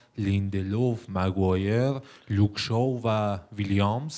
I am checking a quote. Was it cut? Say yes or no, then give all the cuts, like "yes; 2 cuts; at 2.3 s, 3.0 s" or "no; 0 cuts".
no; 0 cuts